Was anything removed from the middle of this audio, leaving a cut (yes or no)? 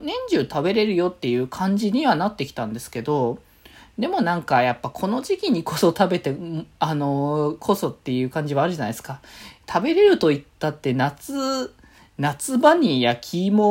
no